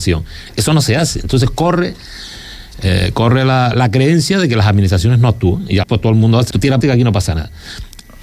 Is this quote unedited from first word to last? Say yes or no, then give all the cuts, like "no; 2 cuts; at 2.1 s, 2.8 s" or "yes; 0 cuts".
no; 4 cuts; at 3.7 s, 5.8 s, 6.5 s, 6.8 s